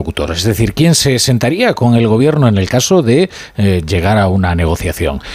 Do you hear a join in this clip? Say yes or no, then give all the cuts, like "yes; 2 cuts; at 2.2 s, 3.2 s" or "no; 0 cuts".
no; 0 cuts